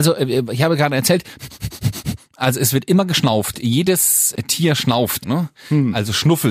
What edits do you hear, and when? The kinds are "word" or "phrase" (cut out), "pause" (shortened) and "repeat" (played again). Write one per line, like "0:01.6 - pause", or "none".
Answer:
0:05.2 - word

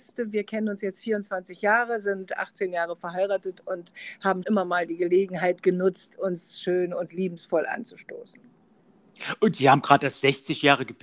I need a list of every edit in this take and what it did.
0:04.4 - word

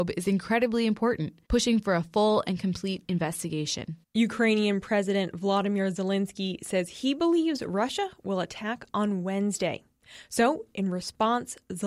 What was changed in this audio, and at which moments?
0:01.4 - pause
0:04.0 - pause

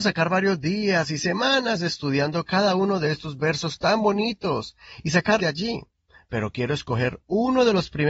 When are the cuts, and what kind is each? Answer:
0:05.4 - word

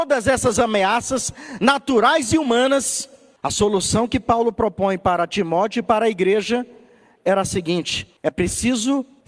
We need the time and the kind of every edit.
none

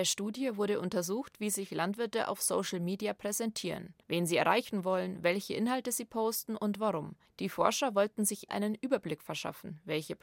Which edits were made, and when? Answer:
0:04.0 - pause
0:07.3 - pause
0:08.5 - word

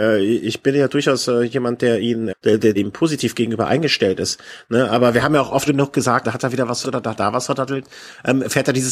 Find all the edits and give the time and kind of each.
0:02.3 - word
0:02.8 - word
0:05.7 - word
0:06.2 - word
0:06.8 - word
0:07.1 - word

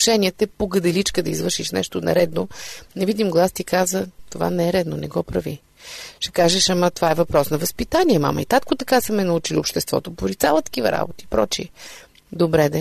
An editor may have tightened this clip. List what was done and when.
none

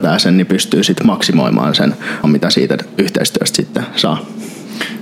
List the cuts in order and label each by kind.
0:02.2 - word

